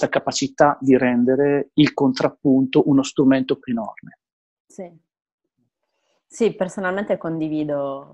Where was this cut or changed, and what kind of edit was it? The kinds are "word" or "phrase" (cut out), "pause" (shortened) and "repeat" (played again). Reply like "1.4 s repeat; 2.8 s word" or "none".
3.6 s word